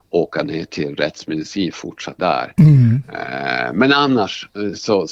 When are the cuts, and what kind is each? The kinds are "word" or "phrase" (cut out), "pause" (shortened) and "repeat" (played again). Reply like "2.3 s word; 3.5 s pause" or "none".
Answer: 1.7 s word; 2.2 s word